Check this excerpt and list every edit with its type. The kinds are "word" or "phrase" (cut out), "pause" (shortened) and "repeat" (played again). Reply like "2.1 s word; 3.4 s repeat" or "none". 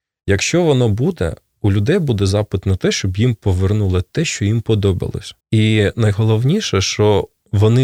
5.4 s pause